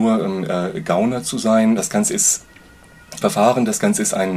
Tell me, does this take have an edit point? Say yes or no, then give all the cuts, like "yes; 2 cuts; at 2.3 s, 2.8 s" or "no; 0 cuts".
yes; 1 cut; at 3.2 s